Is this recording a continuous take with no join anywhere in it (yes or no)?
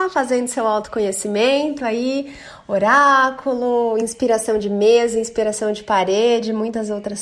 yes